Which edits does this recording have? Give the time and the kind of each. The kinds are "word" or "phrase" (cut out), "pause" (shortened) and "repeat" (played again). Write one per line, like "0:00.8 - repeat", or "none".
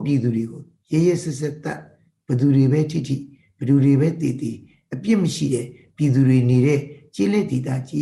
none